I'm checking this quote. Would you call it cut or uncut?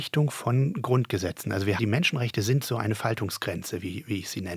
cut